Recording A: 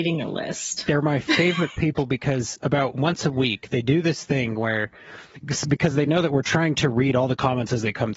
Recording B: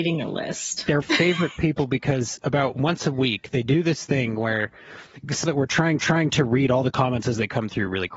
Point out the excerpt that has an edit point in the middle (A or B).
B